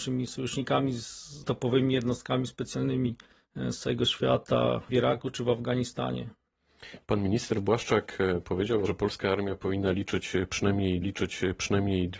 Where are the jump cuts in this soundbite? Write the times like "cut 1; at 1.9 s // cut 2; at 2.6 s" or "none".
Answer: cut 1; at 1.4 s // cut 2; at 3.3 s // cut 3; at 4.9 s // cut 4; at 8.9 s // cut 5; at 11.0 s